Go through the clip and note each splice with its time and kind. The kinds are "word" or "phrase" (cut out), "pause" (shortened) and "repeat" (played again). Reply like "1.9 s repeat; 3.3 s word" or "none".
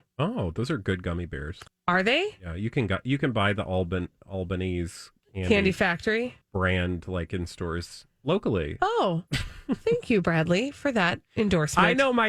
1.7 s pause; 5.2 s pause; 6.4 s pause